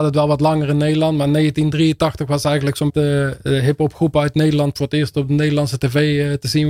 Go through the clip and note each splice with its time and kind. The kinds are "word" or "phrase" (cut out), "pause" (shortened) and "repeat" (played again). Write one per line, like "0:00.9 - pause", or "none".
0:02.9 - phrase

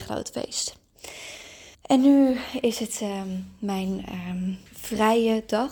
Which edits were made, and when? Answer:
0:01.7 - pause
0:04.7 - pause

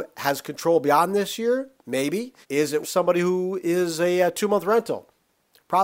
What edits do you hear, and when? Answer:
0:02.4 - pause
0:02.8 - phrase

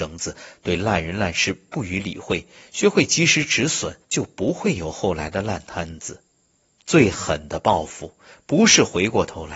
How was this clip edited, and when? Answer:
0:04.0 - pause
0:06.6 - pause

